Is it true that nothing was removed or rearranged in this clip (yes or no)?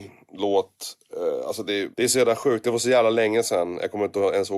no